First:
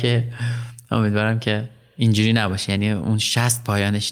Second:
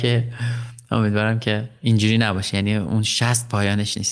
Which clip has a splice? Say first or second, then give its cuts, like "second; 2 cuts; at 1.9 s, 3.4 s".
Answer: second; 1 cut; at 1.8 s